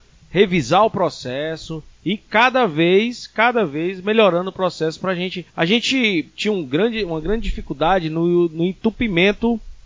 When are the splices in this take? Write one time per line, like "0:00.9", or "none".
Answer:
0:05.5